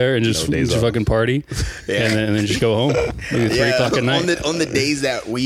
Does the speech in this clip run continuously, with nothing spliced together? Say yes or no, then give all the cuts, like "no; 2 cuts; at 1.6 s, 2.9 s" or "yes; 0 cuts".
yes; 0 cuts